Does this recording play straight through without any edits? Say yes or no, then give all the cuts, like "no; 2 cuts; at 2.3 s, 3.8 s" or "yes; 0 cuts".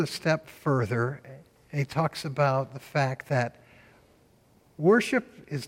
yes; 0 cuts